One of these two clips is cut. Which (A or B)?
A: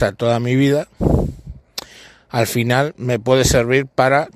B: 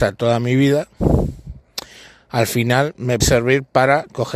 B